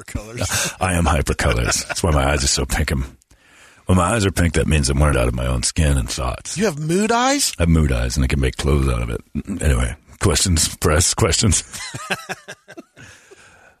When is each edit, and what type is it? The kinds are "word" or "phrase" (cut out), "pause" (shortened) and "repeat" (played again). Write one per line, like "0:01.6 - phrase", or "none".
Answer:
0:05.1 - phrase